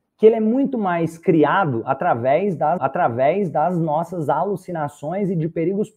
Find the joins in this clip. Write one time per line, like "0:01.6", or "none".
0:02.8